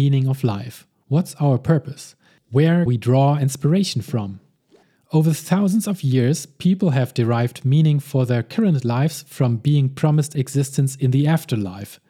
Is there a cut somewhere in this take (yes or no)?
yes